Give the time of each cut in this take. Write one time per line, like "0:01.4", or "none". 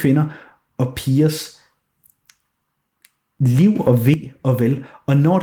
none